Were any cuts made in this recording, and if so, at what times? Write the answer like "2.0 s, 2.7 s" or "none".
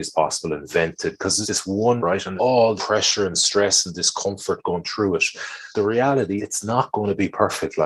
1.4 s, 2.0 s, 2.4 s, 2.8 s, 5.7 s, 6.4 s